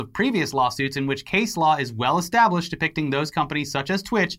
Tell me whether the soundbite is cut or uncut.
uncut